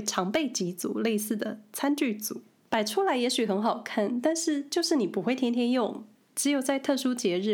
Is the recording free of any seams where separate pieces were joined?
yes; 0 cuts

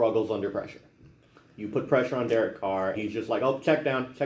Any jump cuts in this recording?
yes; 1 cut; at 2.9 s

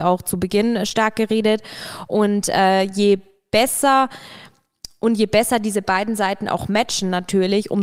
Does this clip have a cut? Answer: no; 0 cuts

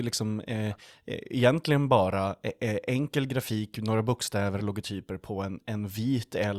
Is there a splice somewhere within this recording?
no; 0 cuts

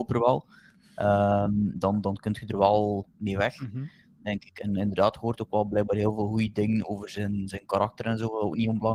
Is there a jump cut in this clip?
no; 0 cuts

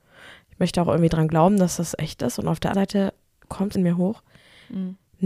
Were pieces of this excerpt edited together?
yes; 2 cuts; at 2.7 s, 3.7 s

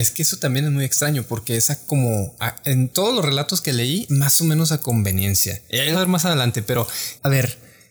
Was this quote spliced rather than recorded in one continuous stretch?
yes; 2 cuts; at 4.1 s, 5.9 s

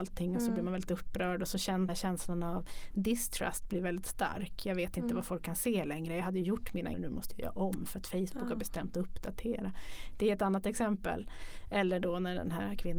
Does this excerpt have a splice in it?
yes; 2 cuts; at 1.9 s, 6.9 s

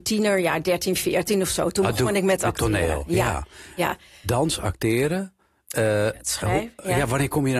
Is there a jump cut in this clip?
no; 0 cuts

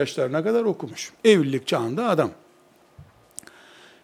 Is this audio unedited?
no; 1 cut; at 1.2 s

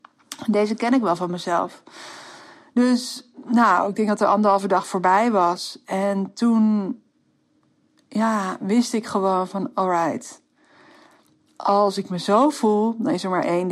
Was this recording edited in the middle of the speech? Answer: no; 0 cuts

